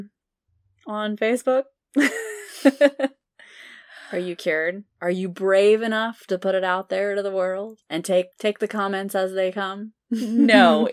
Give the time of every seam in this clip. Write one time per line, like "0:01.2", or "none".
0:04.9
0:07.8
0:08.3